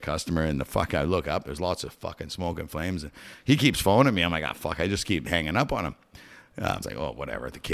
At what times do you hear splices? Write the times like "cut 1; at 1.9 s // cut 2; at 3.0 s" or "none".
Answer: cut 1; at 6.8 s